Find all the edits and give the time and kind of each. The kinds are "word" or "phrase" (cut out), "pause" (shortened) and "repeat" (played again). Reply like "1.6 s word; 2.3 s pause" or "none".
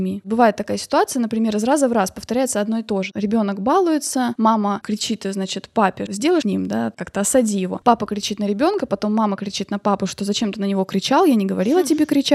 6.4 s phrase